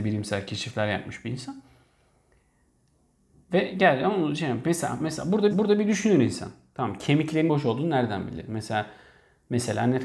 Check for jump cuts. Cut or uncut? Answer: cut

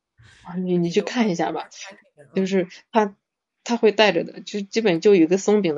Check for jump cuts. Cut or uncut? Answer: uncut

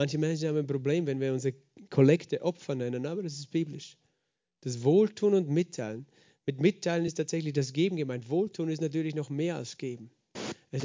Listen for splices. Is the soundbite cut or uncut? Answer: uncut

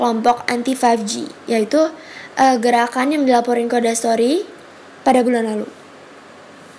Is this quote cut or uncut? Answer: uncut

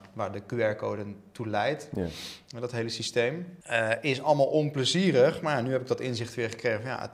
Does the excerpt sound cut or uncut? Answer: cut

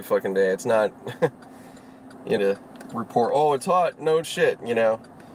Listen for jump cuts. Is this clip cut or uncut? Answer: cut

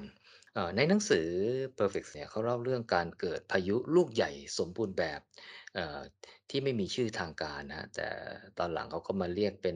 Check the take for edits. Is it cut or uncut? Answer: cut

